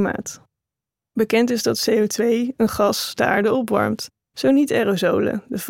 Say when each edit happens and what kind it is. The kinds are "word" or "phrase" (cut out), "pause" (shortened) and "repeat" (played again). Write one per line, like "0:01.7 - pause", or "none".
0:04.2 - pause